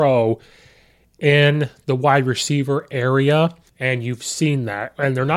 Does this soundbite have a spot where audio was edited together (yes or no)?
yes